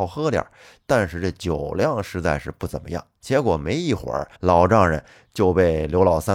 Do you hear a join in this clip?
yes; 2 cuts; at 3.1 s, 4.3 s

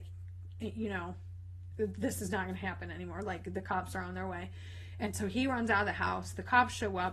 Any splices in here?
no; 0 cuts

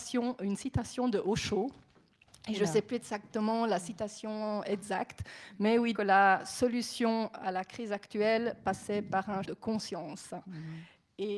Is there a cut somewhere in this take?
yes; 2 cuts; at 5.9 s, 9.4 s

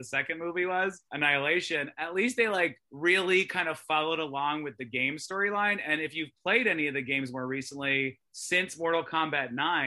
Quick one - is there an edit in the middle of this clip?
yes; 3 cuts; at 1.1 s, 2.8 s, 8.2 s

